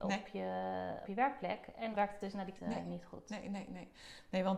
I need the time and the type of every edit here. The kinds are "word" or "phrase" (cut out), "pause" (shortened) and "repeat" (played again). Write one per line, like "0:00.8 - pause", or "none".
0:01.0 - word
0:01.9 - word
0:02.6 - phrase